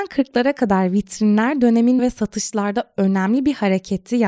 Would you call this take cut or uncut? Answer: cut